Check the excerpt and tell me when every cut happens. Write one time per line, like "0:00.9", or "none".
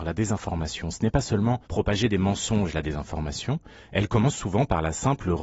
0:01.6